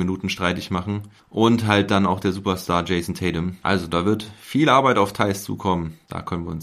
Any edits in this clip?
no; 0 cuts

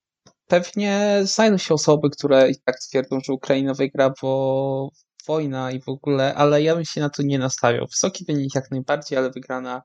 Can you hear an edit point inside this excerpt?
no; 0 cuts

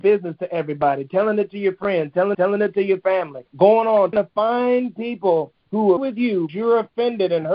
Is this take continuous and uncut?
no; 5 cuts; at 2.3 s, 3.5 s, 4.1 s, 6.0 s, 6.5 s

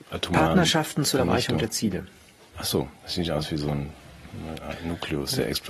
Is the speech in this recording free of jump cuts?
yes; 0 cuts

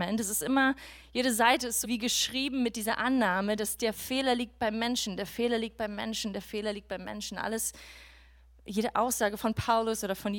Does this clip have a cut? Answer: yes; 1 cut; at 1.8 s

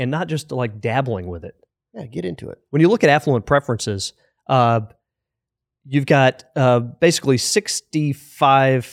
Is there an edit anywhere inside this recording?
no; 0 cuts

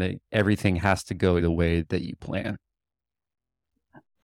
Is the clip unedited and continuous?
no; 2 cuts; at 1.4 s, 1.8 s

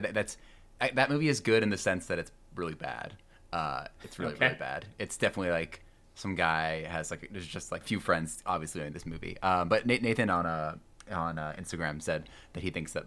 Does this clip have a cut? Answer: yes; 1 cut; at 7.8 s

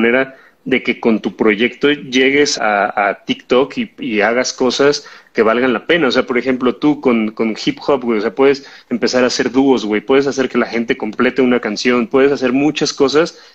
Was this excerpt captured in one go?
no; 1 cut; at 2.6 s

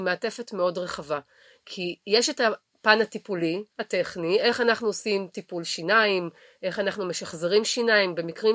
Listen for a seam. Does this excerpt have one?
no; 0 cuts

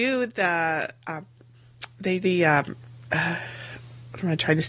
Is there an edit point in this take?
yes; 1 cut; at 2.2 s

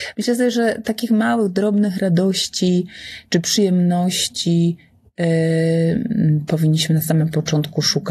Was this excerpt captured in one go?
yes; 0 cuts

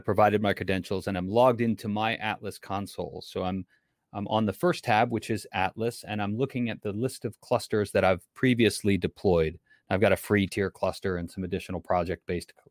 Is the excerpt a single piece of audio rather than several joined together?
yes; 0 cuts

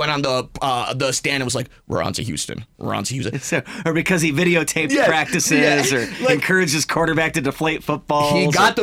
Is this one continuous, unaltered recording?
yes; 0 cuts

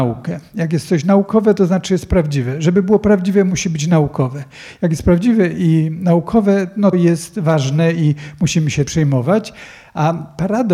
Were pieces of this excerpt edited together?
yes; 2 cuts; at 6.9 s, 8.9 s

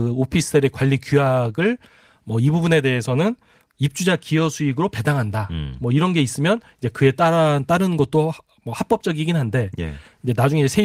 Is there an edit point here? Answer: no; 0 cuts

